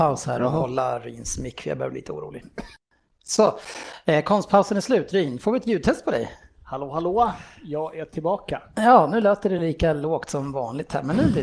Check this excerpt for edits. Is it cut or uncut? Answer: uncut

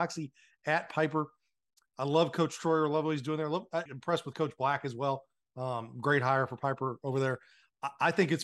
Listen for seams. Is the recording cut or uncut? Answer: cut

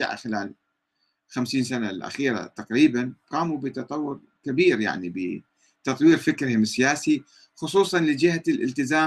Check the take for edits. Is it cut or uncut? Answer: uncut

